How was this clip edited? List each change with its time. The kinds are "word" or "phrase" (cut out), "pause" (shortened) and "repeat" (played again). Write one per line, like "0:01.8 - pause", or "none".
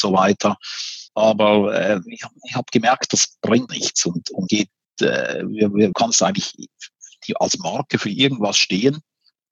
0:01.1 - pause
0:03.7 - word
0:04.5 - word
0:05.9 - phrase